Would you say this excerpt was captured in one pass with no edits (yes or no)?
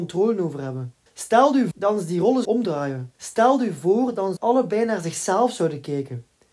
no